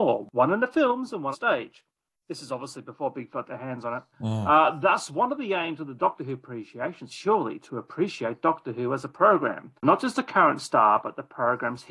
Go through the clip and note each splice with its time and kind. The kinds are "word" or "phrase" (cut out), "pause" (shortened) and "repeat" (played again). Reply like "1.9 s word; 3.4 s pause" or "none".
1.3 s word; 3.3 s word; 4.1 s pause; 7.1 s phrase; 9.8 s pause